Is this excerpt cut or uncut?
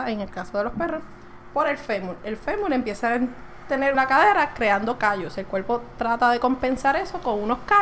cut